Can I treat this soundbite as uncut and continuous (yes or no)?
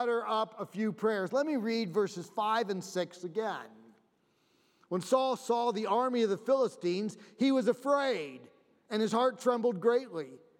yes